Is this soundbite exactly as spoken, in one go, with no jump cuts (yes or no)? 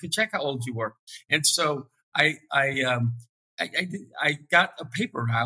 yes